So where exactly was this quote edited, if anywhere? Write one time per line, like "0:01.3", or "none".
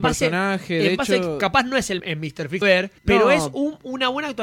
0:02.0
0:02.6
0:03.0

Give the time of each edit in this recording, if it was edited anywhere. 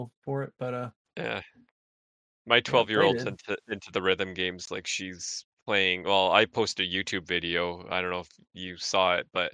none

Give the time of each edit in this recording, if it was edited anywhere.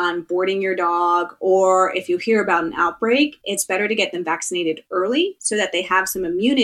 none

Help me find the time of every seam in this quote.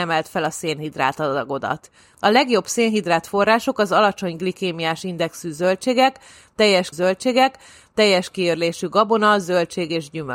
0:06.9

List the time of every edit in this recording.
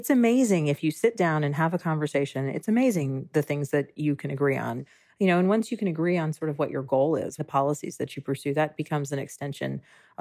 0:07.4

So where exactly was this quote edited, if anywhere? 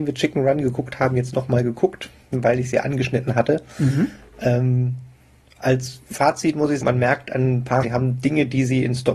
0:06.1
0:06.8
0:07.8

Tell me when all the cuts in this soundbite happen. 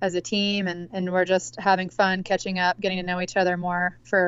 none

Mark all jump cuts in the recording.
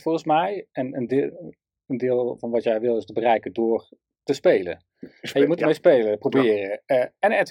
none

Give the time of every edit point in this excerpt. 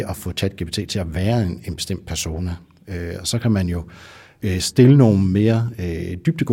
none

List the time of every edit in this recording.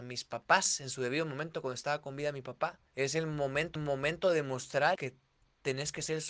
0:02.9
0:03.8
0:05.0

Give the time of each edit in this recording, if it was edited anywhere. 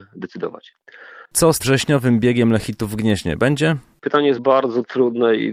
0:01.3
0:01.6
0:04.4

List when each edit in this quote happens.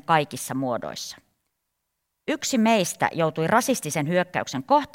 none

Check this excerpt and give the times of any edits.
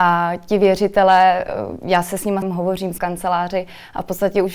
0:02.4
0:03.0

